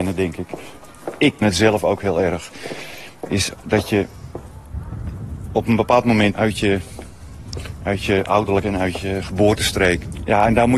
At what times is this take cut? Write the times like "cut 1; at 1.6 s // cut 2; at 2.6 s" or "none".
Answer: cut 1; at 1.4 s // cut 2; at 6.3 s // cut 3; at 8.6 s